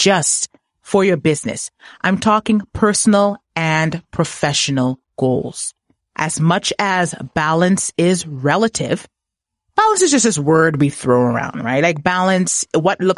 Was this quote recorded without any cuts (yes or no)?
yes